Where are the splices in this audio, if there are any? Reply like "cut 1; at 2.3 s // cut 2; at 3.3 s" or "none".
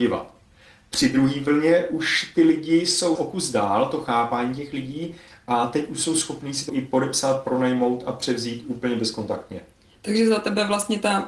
cut 1; at 3.1 s // cut 2; at 6.7 s

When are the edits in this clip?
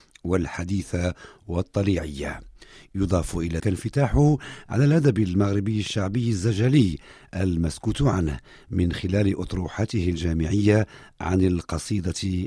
cut 1; at 3.6 s

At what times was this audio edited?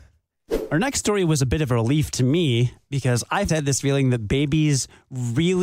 cut 1; at 3.5 s

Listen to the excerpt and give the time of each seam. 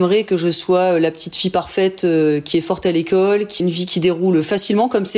cut 1; at 3.6 s

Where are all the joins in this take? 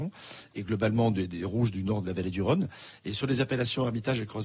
none

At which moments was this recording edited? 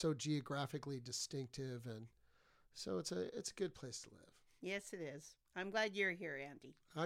none

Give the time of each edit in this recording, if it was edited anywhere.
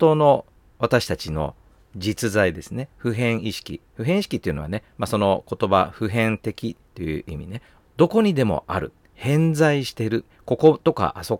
none

